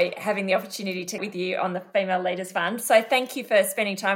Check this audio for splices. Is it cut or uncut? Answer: cut